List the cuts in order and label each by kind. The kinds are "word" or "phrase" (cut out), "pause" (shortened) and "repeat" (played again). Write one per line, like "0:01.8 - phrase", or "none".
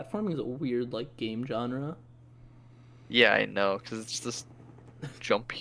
none